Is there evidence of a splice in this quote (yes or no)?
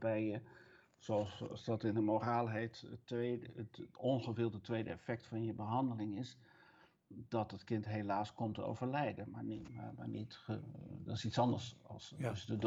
no